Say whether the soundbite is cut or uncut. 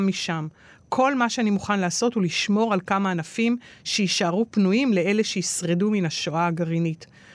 uncut